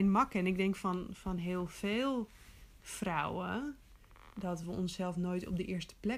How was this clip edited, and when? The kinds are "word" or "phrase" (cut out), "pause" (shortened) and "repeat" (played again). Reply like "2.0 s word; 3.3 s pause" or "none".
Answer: none